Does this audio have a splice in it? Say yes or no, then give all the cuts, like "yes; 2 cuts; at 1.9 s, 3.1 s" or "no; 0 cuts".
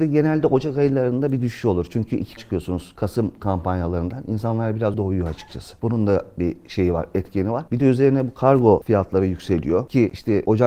yes; 2 cuts; at 2.4 s, 4.9 s